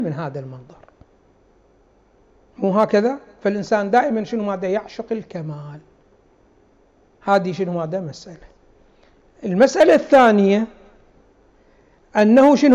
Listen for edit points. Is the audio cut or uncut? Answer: uncut